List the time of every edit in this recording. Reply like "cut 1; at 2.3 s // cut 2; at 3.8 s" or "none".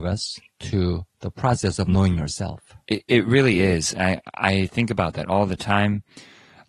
none